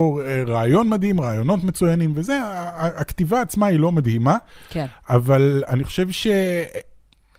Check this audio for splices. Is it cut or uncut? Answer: uncut